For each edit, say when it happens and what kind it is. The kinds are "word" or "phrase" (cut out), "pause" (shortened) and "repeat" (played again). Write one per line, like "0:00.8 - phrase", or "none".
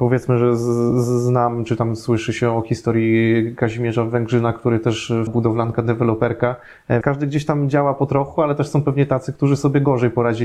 0:05.3 - phrase
0:07.0 - word